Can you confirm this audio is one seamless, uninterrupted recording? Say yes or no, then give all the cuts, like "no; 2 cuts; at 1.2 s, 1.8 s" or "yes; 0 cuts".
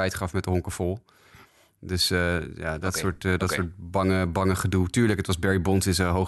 yes; 0 cuts